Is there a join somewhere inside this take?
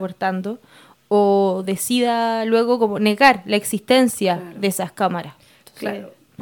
no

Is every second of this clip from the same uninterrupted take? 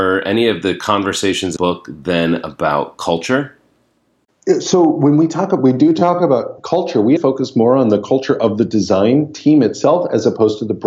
no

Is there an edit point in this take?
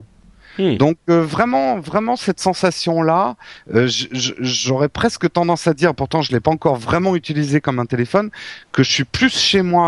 no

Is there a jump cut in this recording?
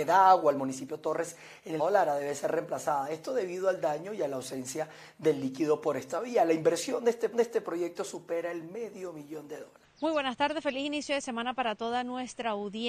yes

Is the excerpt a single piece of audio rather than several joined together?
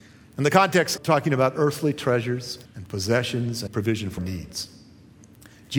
no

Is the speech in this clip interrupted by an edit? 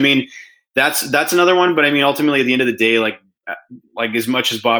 no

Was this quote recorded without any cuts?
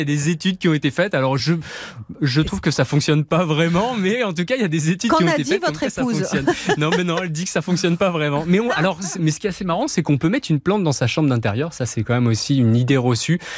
yes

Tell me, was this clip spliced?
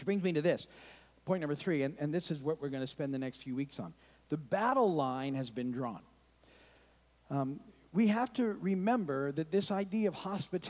no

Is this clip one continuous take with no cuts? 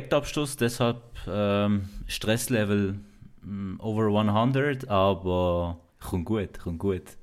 no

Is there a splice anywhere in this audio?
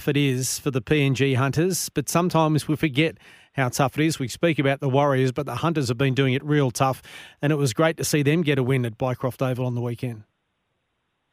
no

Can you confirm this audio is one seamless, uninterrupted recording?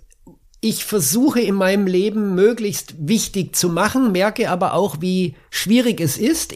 yes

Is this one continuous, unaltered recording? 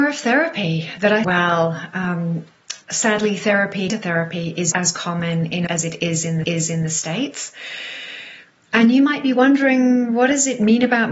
no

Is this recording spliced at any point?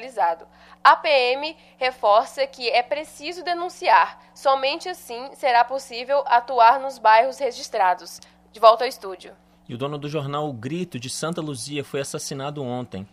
no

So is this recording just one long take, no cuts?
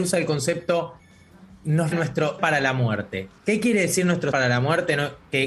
no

